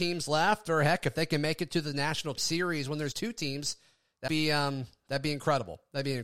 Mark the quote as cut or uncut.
cut